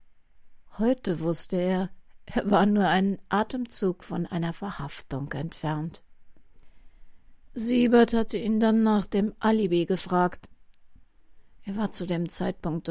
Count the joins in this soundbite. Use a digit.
1